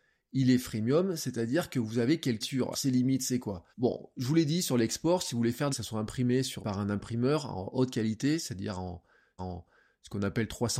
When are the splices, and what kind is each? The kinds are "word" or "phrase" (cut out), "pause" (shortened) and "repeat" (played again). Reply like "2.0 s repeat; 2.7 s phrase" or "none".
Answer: 2.4 s phrase; 2.7 s word; 3.7 s pause; 5.7 s phrase; 6.6 s word; 9.4 s repeat